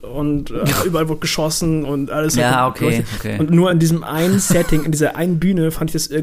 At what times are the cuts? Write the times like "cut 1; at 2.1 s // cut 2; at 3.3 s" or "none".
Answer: none

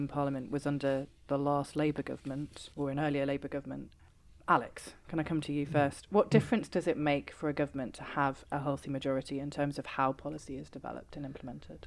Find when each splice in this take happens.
cut 1; at 2.7 s

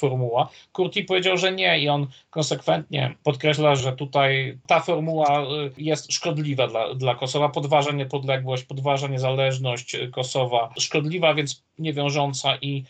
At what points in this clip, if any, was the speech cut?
cut 1; at 3.8 s

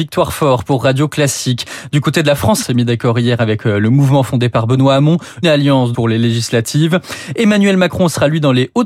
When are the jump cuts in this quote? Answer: cut 1; at 2.6 s // cut 2; at 5.4 s // cut 3; at 5.9 s

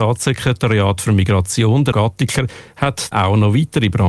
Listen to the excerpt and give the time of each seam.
cut 1; at 1.9 s // cut 2; at 3.1 s

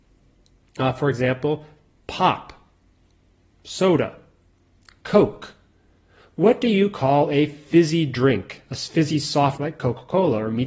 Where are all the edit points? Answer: cut 1; at 9.6 s

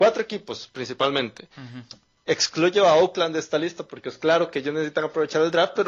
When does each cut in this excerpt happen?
cut 1; at 1.5 s // cut 2; at 2.3 s

